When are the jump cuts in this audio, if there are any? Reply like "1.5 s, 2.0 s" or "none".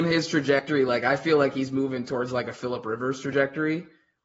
none